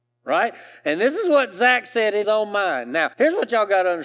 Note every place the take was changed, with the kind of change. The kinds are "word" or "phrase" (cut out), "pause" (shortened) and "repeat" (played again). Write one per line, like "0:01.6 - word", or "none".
0:02.2 - word
0:03.1 - pause